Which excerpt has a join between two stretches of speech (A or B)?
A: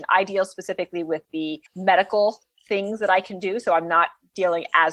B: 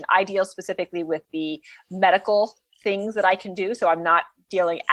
A